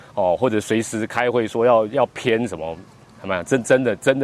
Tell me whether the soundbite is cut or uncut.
uncut